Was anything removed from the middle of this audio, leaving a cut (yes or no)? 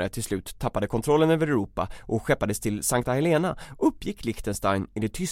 no